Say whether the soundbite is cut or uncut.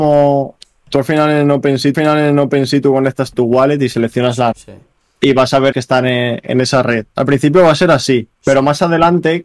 cut